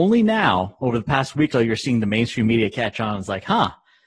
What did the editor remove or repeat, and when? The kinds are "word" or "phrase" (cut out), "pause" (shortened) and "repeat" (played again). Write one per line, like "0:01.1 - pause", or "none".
0:01.5 - word